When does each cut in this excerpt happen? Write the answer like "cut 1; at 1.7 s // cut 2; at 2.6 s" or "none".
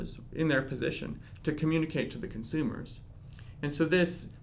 none